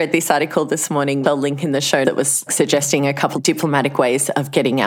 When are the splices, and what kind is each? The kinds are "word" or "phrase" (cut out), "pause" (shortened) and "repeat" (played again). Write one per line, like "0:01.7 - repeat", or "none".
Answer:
0:01.2 - word
0:02.0 - word
0:02.5 - word
0:03.3 - word